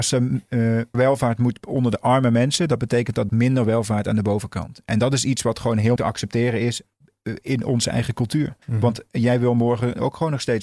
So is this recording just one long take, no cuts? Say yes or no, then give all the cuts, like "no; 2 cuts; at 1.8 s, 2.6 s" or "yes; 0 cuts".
no; 4 cuts; at 0.9 s, 3.3 s, 6.0 s, 8.6 s